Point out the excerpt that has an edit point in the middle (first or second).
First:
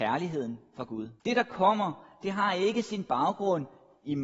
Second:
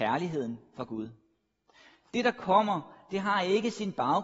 first